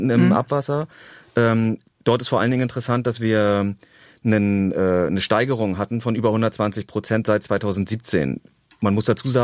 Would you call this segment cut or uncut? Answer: uncut